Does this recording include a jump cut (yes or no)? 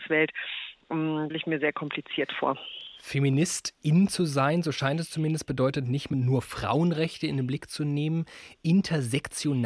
yes